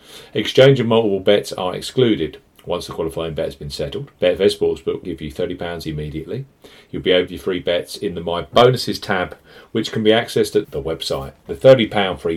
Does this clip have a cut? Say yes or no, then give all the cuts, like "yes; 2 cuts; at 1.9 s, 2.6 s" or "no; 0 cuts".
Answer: yes; 5 cuts; at 4.2 s, 5.0 s, 5.8 s, 7.3 s, 10.6 s